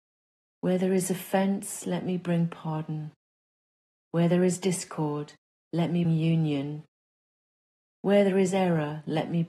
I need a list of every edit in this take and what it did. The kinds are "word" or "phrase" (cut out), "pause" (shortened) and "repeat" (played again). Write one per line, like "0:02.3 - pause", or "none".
0:06.0 - word

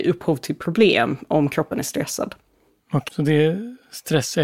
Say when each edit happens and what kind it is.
0:03.1 - word

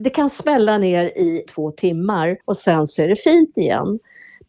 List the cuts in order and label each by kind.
0:01.5 - word
0:02.4 - pause

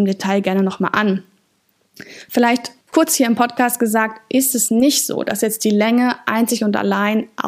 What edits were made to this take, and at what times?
0:02.8 - pause

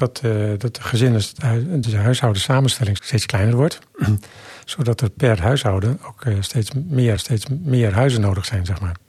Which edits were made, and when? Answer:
0:01.8 - word
0:03.0 - word
0:07.2 - repeat

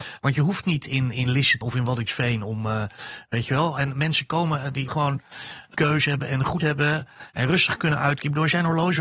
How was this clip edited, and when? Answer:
0:01.6 - word
0:04.9 - word
0:05.7 - word
0:06.6 - word

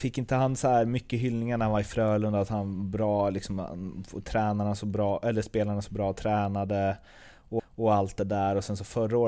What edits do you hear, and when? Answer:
0:07.6 - repeat

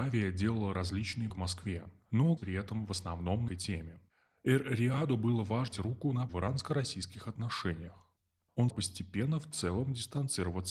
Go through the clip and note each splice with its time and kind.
0:01.3 - word
0:02.4 - word
0:03.5 - word
0:05.7 - word
0:06.3 - word
0:08.7 - word

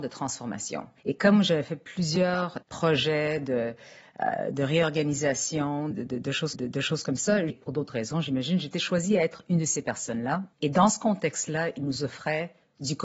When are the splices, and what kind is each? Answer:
0:01.0 - pause
0:02.6 - pause
0:05.9 - word
0:06.5 - repeat
0:07.5 - word
0:10.5 - pause

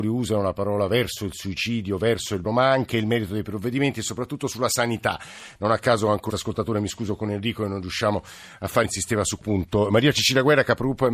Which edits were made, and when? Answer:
0:02.4 - word
0:06.3 - word
0:08.8 - word
0:09.4 - word

